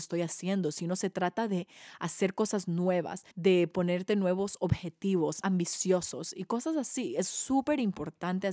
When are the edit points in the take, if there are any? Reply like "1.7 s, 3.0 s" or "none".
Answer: 3.3 s, 5.4 s